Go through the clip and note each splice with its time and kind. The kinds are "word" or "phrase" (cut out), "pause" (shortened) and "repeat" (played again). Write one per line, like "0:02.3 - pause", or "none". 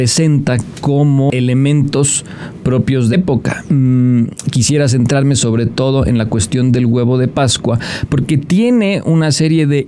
0:03.1 - word